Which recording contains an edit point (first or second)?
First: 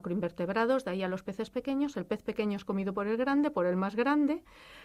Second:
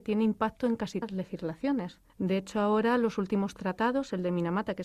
second